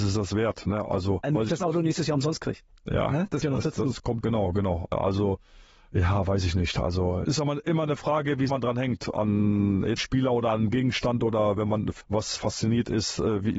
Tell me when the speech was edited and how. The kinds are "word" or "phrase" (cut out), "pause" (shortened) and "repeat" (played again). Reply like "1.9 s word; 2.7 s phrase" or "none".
1.2 s word; 3.4 s word; 4.2 s word; 7.2 s word; 8.5 s word; 10.0 s word; 12.0 s word; 12.4 s word